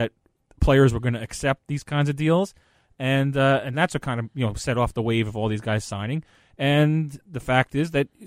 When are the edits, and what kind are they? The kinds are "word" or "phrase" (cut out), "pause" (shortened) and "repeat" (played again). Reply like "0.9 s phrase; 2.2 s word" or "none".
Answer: none